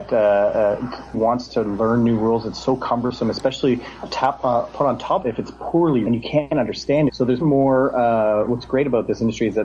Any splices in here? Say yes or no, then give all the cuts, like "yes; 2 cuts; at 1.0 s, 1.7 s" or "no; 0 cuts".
yes; 5 cuts; at 1.1 s, 5.2 s, 6.1 s, 7.1 s, 7.4 s